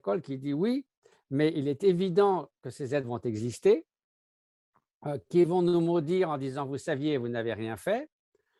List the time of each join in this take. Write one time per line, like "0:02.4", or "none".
none